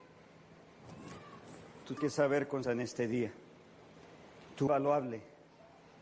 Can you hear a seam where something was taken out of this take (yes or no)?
yes